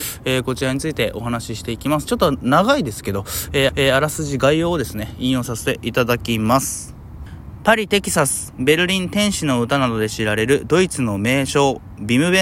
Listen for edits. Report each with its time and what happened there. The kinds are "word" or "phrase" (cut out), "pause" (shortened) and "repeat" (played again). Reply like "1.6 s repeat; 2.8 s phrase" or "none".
3.7 s repeat